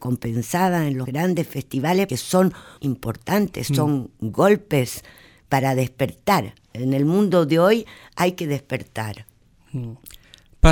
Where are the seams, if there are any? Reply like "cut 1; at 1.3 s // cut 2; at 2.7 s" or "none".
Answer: cut 1; at 1.0 s // cut 2; at 2.1 s // cut 3; at 2.8 s